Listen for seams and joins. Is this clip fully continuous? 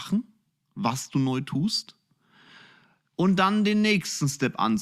yes; 0 cuts

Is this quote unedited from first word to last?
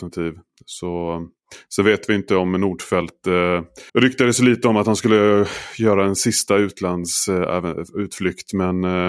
no; 1 cut; at 3.9 s

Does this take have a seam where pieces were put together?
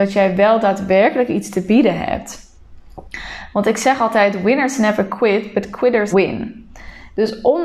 yes; 1 cut; at 6.1 s

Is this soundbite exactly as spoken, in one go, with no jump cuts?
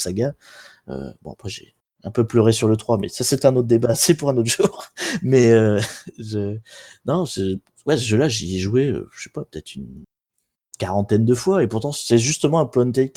yes; 0 cuts

